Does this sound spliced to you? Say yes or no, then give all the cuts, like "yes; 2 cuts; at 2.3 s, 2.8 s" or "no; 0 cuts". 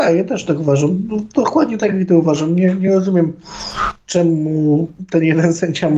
no; 0 cuts